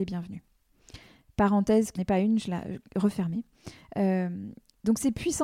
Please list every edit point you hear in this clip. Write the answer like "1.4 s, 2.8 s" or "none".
2.0 s